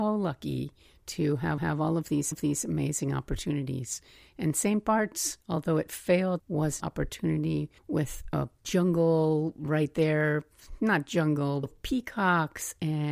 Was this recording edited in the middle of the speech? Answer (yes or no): yes